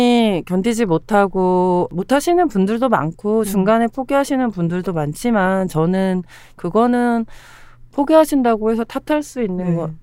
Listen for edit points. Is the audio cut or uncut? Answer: uncut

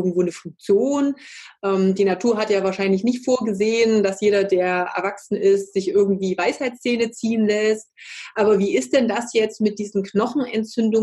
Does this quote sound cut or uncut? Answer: uncut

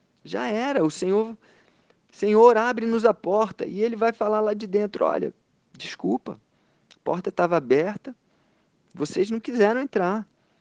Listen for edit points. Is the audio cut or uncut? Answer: uncut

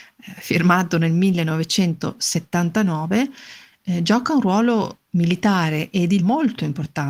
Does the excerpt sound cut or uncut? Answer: cut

